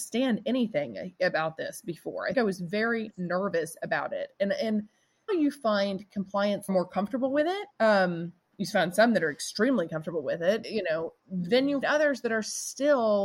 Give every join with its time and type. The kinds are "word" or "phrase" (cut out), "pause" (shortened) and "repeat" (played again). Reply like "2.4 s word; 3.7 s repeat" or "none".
2.3 s word; 5.3 s word; 6.7 s phrase; 7.7 s pause; 10.6 s word; 11.2 s pause; 11.8 s word